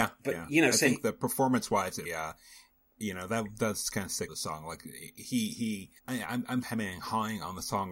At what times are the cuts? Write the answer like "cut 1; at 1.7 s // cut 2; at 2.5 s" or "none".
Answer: cut 1; at 2.1 s // cut 2; at 4.3 s // cut 3; at 6.0 s // cut 4; at 6.6 s